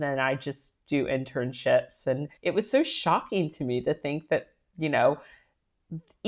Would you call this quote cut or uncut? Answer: cut